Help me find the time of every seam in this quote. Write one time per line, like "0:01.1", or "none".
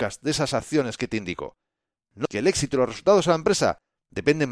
0:02.3